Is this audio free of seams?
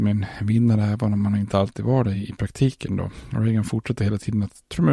yes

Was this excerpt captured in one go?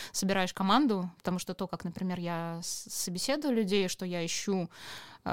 yes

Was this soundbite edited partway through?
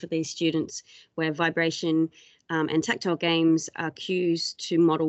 no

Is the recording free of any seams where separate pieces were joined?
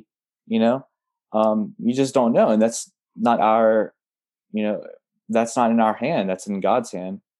no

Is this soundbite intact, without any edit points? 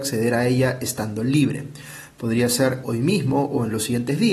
no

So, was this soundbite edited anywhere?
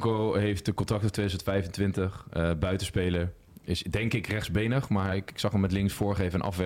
no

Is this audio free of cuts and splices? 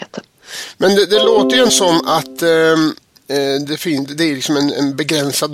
no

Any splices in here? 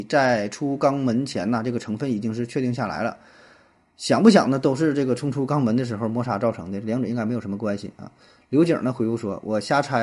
no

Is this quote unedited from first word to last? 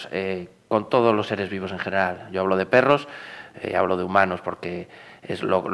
yes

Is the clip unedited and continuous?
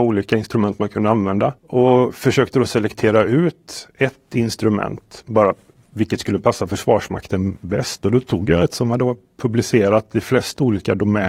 no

